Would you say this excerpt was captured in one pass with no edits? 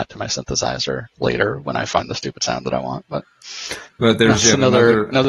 yes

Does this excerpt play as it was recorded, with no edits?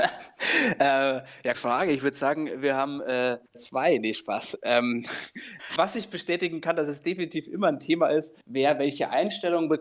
no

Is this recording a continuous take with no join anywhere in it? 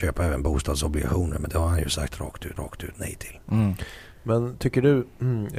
no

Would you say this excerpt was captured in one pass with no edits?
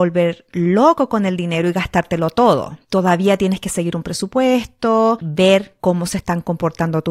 no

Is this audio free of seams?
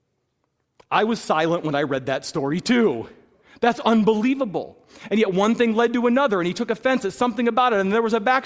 yes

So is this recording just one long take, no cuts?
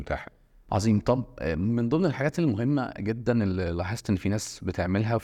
yes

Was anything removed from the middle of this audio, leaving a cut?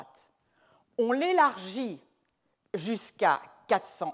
no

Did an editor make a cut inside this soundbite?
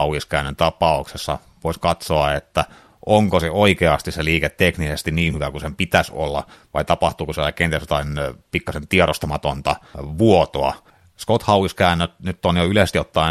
no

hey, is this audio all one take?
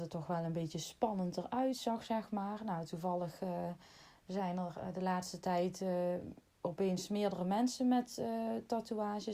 yes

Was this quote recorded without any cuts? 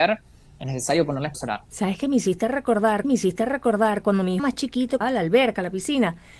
no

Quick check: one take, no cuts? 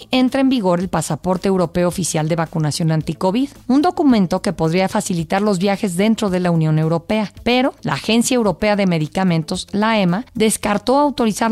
yes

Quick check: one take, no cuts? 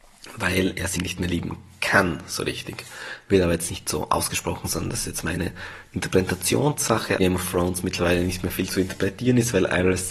no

